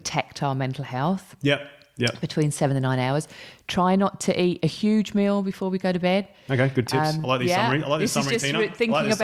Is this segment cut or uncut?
uncut